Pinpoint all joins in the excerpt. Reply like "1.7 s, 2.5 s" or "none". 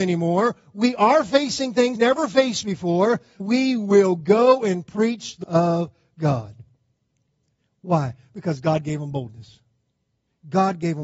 2.0 s, 3.4 s, 5.4 s